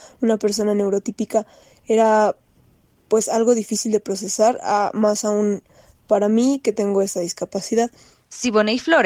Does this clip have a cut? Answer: no; 0 cuts

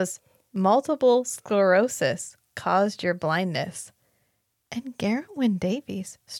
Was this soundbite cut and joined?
no; 0 cuts

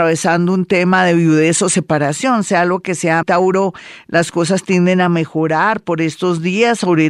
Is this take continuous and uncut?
no; 1 cut; at 3.2 s

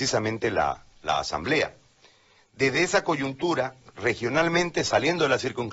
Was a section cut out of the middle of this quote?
no; 0 cuts

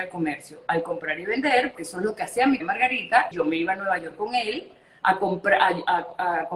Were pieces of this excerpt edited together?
yes; 3 cuts; at 1.8 s, 2.6 s, 3.3 s

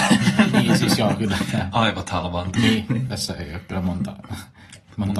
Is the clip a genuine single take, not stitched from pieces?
yes; 0 cuts

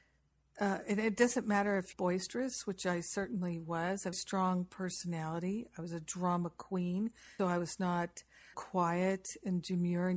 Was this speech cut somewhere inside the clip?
yes; 4 cuts; at 1.9 s, 4.1 s, 7.4 s, 8.5 s

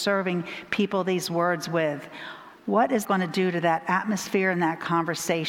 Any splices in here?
yes; 1 cut; at 3.0 s

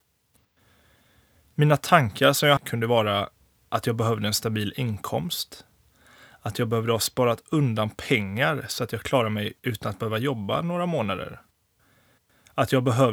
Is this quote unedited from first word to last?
no; 1 cut; at 2.6 s

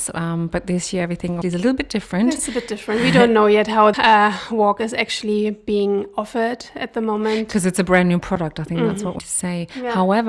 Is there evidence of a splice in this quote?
yes; 3 cuts; at 1.4 s, 3.9 s, 9.2 s

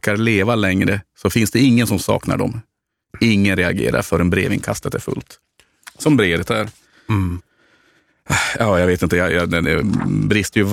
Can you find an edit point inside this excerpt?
no; 0 cuts

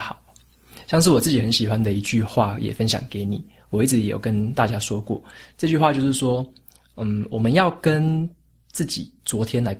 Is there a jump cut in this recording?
no; 0 cuts

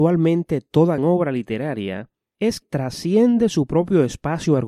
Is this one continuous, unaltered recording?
no; 2 cuts; at 1.0 s, 2.6 s

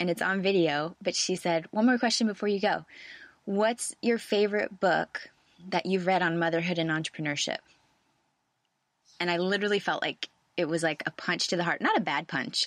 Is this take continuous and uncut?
yes; 0 cuts

